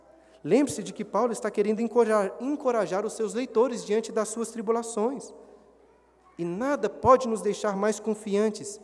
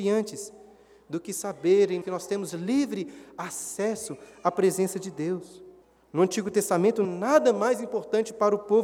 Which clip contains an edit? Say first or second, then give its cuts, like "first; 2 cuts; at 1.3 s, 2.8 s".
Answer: second; 3 cuts; at 2.0 s, 5.8 s, 7.0 s